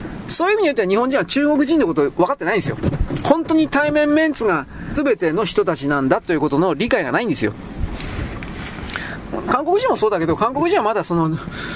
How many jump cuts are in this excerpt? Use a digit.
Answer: 1